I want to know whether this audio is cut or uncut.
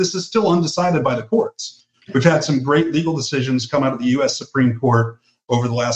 uncut